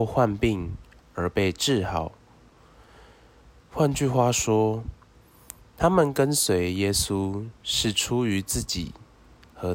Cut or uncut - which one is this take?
uncut